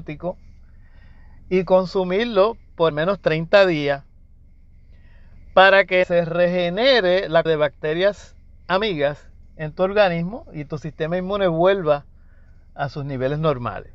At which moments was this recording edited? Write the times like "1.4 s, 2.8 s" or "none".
2.9 s, 6.0 s, 7.5 s